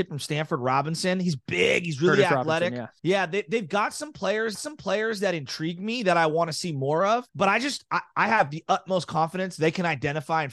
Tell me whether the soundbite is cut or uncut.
cut